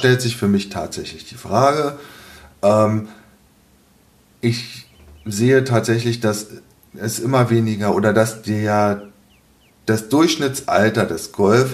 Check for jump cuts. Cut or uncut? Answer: uncut